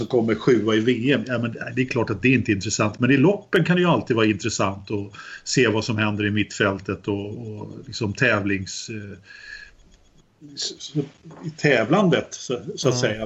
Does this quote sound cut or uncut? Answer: uncut